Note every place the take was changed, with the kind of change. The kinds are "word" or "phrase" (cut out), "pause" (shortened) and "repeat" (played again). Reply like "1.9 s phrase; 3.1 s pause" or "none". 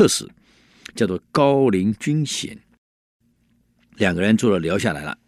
none